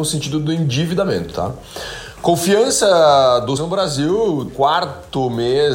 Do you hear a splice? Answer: yes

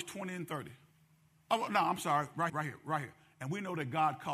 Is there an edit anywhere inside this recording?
yes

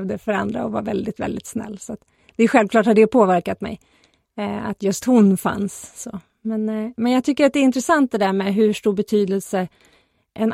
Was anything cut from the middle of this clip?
no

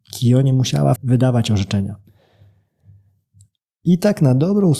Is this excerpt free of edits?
no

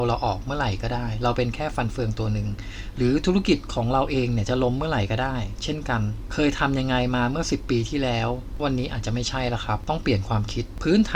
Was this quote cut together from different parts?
yes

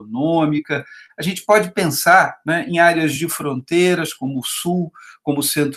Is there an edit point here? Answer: no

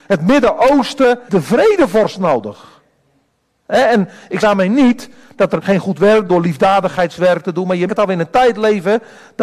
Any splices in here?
yes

